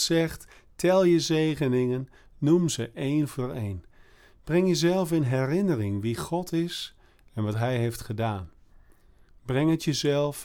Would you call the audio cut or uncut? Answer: uncut